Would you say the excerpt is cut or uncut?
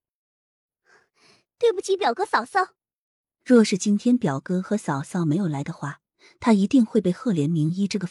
uncut